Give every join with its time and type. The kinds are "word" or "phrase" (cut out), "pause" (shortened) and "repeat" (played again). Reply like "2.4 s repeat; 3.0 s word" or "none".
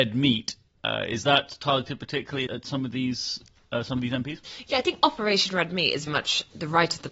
2.5 s word; 6.1 s word

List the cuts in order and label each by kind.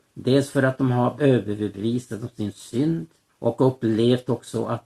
1.2 s word; 3.3 s pause

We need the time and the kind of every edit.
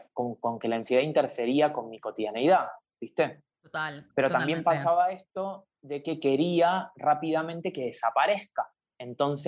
4.1 s pause; 5.8 s pause

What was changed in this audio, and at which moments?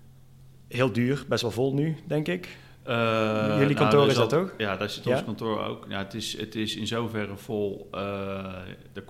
none

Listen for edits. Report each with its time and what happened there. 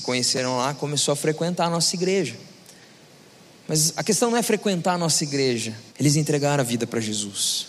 5.9 s pause

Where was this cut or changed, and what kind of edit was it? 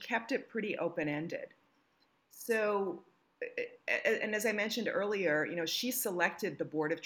none

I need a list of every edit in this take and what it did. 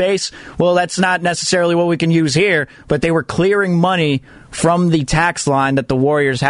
none

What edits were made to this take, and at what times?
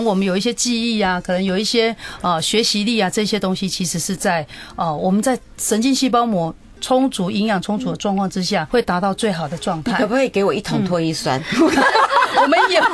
8.7 s word

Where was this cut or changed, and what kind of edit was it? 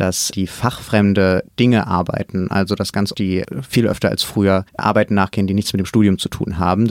3.1 s word; 4.7 s pause

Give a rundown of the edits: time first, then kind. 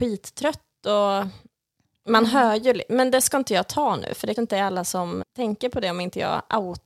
4.4 s word; 5.2 s word

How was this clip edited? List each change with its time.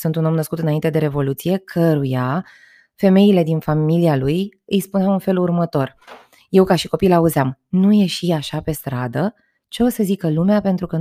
none

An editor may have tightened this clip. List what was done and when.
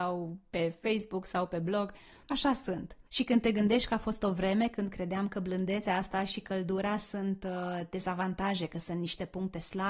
3.1 s pause

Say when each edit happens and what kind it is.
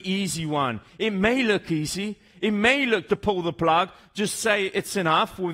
3.1 s word

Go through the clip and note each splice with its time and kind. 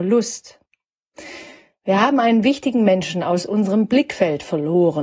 none

